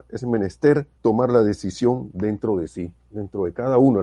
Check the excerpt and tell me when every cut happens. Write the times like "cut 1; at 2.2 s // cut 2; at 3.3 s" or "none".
cut 1; at 0.9 s